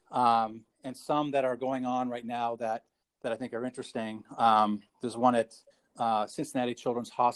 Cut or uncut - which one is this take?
cut